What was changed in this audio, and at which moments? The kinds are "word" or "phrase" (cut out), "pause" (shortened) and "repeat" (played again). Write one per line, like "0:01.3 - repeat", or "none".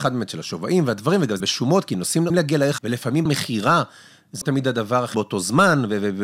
0:01.4 - word
0:02.3 - word
0:02.8 - word
0:03.3 - word
0:04.4 - word
0:05.1 - word

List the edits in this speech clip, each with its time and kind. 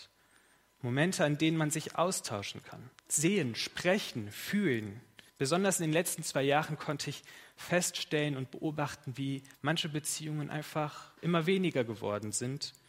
0:03.0 - pause
0:05.3 - pause
0:09.5 - pause
0:11.2 - pause

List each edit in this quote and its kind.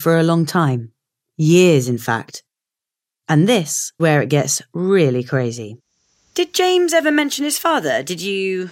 0:04.0 - word

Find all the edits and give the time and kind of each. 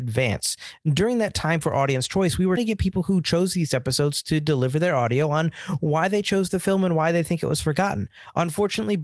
0:02.6 - word

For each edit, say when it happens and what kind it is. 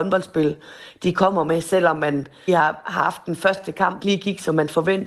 0:02.5 - phrase
0:04.0 - phrase

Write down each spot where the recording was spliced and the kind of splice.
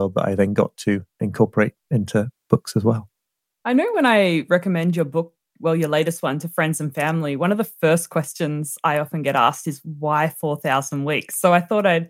none

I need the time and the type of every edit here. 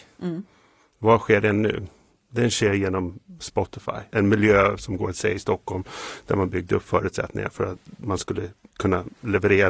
none

